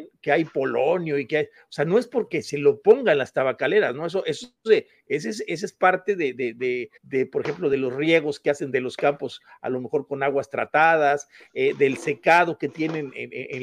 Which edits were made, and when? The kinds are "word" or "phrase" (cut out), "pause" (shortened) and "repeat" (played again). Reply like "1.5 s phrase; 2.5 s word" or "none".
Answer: 7.0 s pause